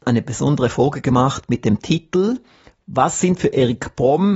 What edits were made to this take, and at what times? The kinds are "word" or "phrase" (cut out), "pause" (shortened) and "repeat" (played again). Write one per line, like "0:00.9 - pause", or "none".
none